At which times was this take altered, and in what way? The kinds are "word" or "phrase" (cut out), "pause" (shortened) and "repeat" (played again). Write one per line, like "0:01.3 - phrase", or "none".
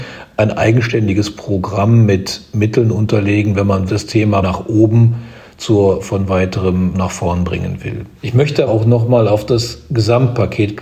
0:03.9 - word
0:04.4 - word
0:06.0 - word
0:06.9 - word
0:08.2 - pause
0:08.7 - phrase